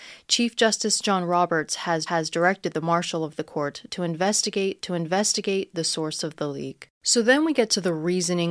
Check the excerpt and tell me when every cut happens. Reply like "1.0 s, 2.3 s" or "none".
2.1 s, 4.8 s, 6.9 s